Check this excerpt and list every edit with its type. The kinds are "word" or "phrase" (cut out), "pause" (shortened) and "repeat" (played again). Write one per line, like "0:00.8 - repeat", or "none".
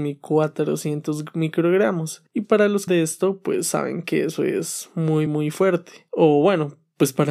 0:02.4 - word
0:02.9 - phrase
0:05.3 - word